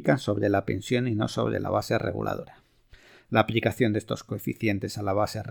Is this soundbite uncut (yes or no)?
yes